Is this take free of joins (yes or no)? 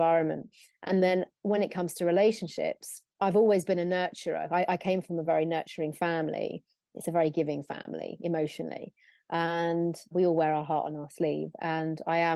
yes